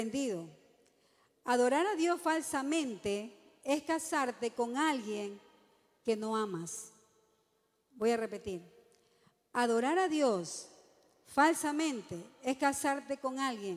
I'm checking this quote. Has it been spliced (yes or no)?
no